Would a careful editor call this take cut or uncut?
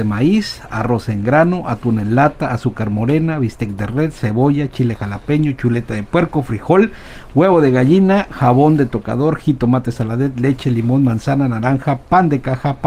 uncut